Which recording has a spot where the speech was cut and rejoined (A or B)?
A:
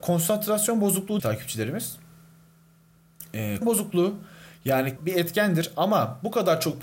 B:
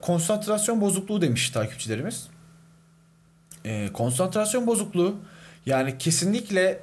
A